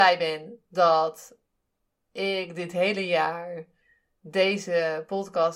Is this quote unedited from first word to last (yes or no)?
yes